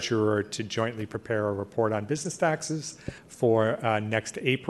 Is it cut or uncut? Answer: cut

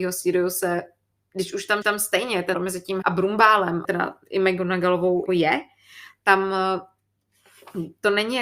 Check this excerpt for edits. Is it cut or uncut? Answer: cut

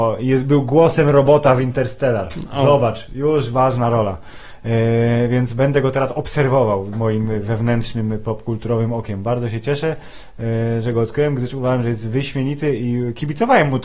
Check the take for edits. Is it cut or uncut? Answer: cut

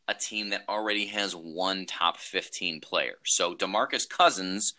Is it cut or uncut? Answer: uncut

